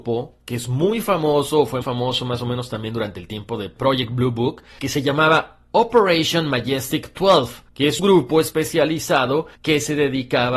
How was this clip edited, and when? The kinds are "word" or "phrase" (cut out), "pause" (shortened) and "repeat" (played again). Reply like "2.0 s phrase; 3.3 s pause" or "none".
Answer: 1.8 s word; 7.7 s pause; 8.0 s word; 9.6 s pause

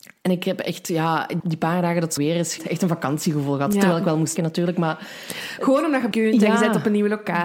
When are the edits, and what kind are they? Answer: 1.4 s word; 2.2 s word; 2.6 s word; 4.4 s word; 6.1 s word

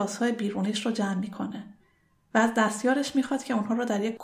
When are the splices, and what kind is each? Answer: none

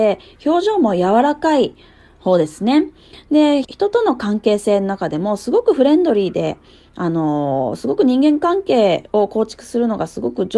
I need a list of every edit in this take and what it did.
3.6 s word

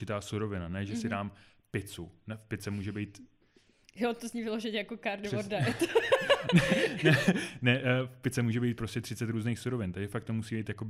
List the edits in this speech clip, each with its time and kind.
none

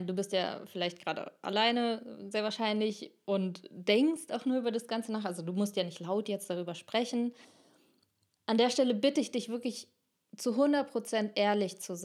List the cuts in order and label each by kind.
none

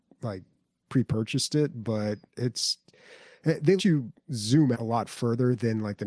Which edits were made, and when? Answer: 2.3 s pause; 3.8 s word; 4.7 s word

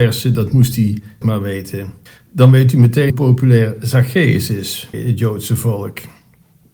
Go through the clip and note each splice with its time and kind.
1.2 s word; 2.1 s pause; 3.1 s word; 4.9 s word

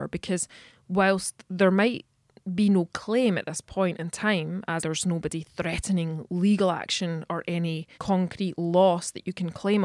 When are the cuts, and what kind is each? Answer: 4.8 s word; 7.9 s pause

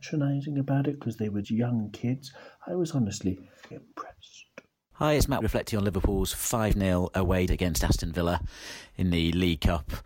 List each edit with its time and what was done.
1.4 s word; 3.7 s word; 5.4 s word; 7.5 s word

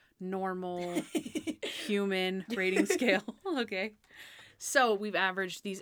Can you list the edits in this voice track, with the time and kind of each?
none

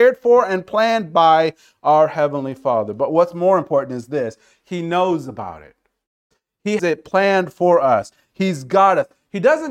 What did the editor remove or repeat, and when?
6.8 s word

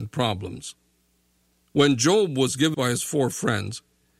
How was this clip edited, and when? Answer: 2.7 s word

